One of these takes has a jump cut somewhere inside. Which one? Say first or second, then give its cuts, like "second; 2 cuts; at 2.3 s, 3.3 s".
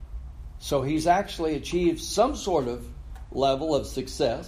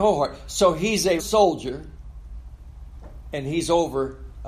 second; 1 cut; at 1.2 s